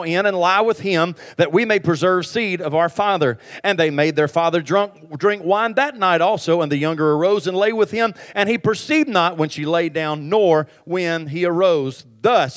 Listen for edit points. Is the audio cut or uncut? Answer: uncut